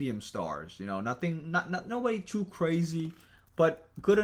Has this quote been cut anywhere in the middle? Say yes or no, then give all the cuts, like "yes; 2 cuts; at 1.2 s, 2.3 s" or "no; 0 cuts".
no; 0 cuts